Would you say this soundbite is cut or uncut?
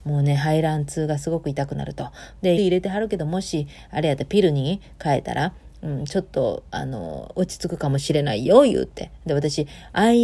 cut